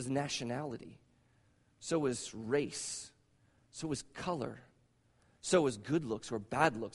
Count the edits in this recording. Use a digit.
0